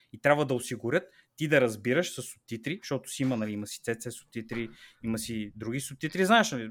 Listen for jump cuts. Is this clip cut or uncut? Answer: uncut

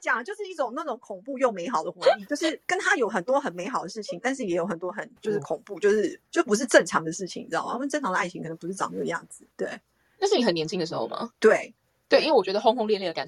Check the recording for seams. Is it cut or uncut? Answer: cut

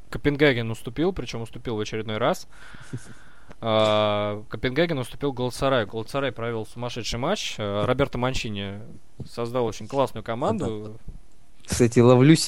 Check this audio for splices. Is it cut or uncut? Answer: uncut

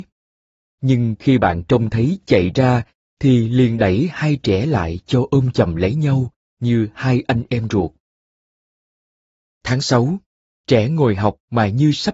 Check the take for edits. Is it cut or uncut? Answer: uncut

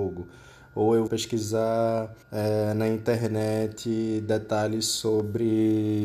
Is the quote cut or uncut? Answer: cut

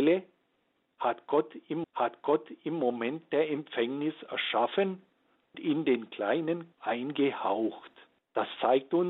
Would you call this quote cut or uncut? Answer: cut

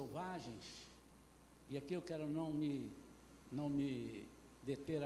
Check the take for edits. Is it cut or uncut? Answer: cut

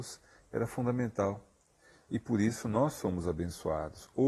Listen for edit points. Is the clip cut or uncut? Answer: uncut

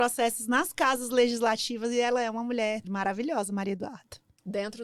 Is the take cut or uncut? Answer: cut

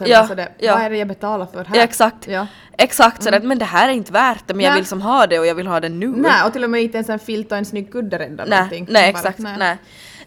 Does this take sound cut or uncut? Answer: uncut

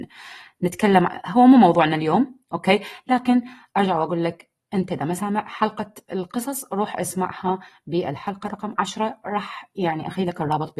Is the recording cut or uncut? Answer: uncut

